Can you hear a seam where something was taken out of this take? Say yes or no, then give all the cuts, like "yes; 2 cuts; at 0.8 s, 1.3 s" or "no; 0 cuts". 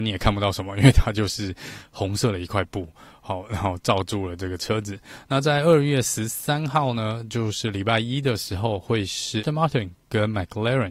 yes; 1 cut; at 9.4 s